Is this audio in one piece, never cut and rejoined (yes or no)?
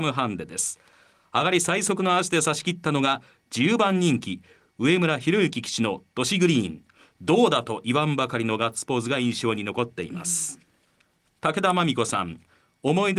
yes